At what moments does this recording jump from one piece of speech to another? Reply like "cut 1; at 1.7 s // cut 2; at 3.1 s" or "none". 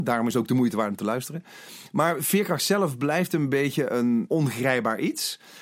cut 1; at 4.3 s